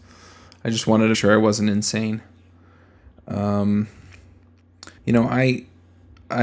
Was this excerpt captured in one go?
no; 2 cuts; at 1.1 s, 5.0 s

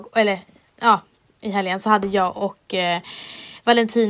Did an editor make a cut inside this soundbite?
no; 0 cuts

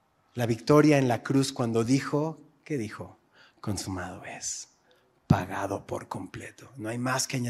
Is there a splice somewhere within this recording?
no; 0 cuts

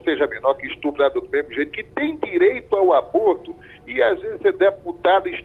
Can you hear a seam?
no; 0 cuts

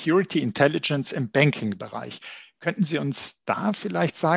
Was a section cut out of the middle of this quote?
no; 0 cuts

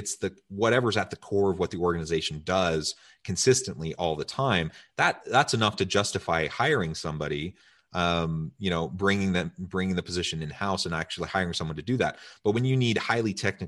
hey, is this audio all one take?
yes; 0 cuts

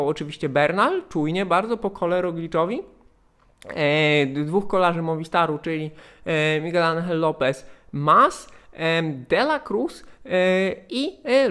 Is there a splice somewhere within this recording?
no; 0 cuts

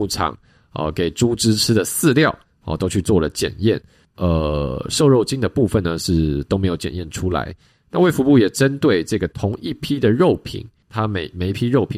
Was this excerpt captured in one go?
yes; 0 cuts

